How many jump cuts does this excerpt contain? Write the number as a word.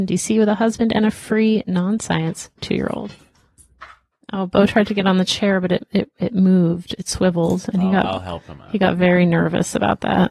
one